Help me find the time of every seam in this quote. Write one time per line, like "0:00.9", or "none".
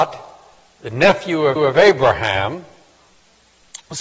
0:01.6